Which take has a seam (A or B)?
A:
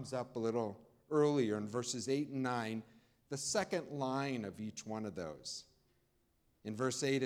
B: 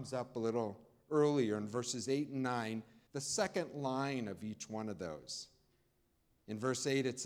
B